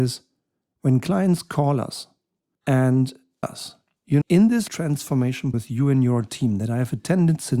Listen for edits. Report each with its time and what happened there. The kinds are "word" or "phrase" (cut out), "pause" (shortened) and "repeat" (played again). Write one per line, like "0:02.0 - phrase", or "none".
0:03.4 - word
0:04.2 - word
0:04.7 - word
0:05.5 - word